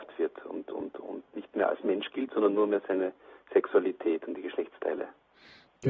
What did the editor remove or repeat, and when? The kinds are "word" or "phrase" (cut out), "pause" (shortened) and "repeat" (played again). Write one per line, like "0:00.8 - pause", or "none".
none